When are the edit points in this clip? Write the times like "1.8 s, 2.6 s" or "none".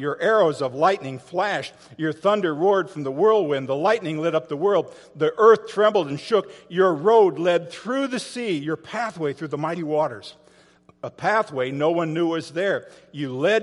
none